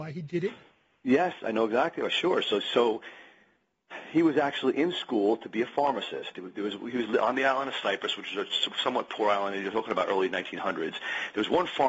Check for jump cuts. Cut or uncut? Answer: uncut